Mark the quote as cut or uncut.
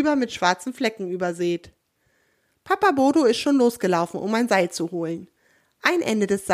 uncut